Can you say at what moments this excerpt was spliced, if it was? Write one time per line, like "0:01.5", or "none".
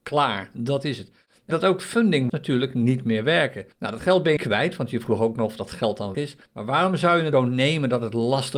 0:01.5
0:02.3
0:03.7
0:04.4
0:06.1
0:06.5
0:07.3